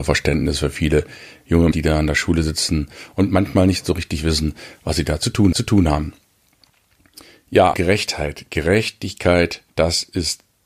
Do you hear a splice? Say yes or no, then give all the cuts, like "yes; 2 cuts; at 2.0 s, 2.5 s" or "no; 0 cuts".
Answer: yes; 5 cuts; at 1.7 s, 3.3 s, 5.5 s, 7.7 s, 9.7 s